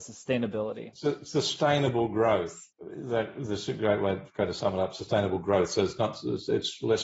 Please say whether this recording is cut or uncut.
cut